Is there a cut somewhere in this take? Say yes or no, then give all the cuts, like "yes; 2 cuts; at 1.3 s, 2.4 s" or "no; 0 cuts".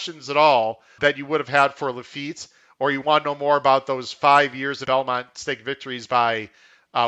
yes; 2 cuts; at 1.0 s, 4.9 s